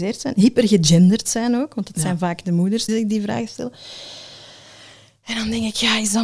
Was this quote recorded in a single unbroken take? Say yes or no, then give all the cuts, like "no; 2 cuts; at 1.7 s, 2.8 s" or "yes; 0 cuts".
no; 1 cut; at 2.9 s